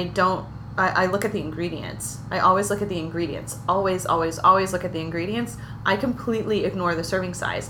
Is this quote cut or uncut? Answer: uncut